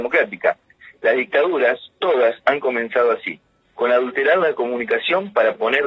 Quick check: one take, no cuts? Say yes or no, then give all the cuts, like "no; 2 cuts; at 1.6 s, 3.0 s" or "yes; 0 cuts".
yes; 0 cuts